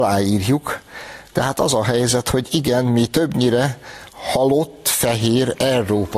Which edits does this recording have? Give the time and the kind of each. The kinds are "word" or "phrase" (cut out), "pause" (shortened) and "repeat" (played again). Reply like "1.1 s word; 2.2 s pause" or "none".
none